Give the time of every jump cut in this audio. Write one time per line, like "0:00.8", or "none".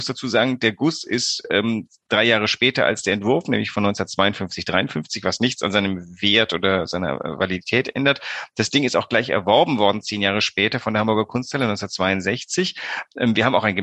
none